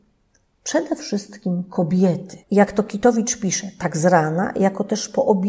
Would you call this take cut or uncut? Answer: cut